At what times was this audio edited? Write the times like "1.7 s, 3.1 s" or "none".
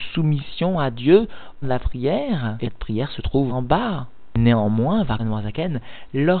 1.6 s, 2.6 s, 3.5 s, 5.2 s